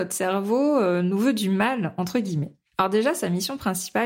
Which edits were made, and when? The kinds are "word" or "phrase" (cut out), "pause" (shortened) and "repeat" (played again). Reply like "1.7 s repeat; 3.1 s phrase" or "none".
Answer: 2.7 s pause